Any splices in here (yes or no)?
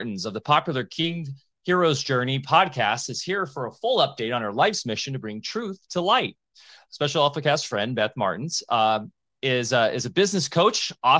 no